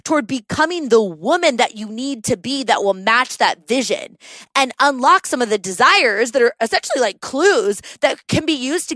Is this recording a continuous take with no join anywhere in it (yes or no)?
yes